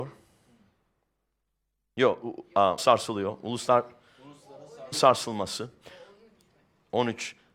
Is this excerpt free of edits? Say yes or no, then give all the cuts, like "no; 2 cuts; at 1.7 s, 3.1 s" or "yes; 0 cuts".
no; 2 cuts; at 2.8 s, 4.9 s